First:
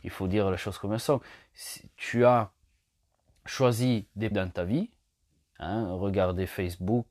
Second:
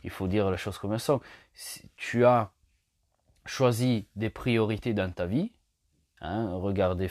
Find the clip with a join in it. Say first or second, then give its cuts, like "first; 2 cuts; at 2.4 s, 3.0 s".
first; 1 cut; at 4.3 s